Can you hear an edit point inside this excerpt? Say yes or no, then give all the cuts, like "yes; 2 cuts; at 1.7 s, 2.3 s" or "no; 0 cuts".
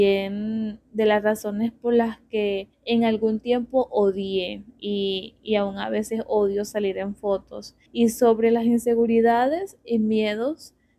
yes; 2 cuts; at 2.7 s, 7.9 s